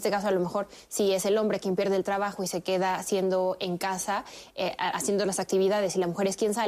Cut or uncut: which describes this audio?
uncut